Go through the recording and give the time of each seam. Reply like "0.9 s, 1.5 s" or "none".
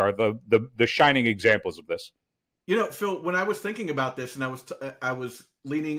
none